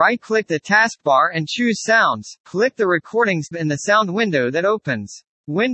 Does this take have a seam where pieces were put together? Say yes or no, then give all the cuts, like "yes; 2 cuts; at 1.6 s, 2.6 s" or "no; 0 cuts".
yes; 2 cuts; at 2.4 s, 3.5 s